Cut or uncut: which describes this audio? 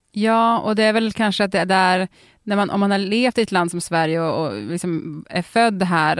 uncut